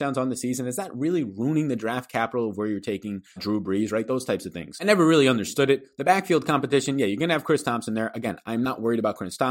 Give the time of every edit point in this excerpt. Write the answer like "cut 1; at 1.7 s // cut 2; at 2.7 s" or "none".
cut 1; at 3.4 s